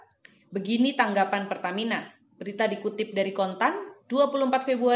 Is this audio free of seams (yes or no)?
yes